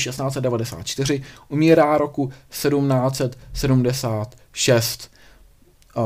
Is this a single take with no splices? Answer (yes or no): yes